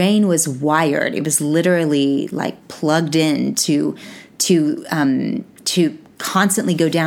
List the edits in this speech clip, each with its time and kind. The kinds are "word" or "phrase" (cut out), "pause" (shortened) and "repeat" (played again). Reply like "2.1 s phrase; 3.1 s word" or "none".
none